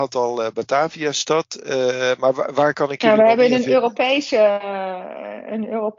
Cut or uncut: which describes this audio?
uncut